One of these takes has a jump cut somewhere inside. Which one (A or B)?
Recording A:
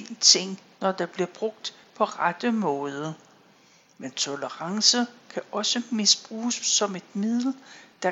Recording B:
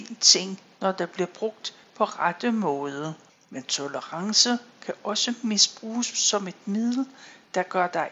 B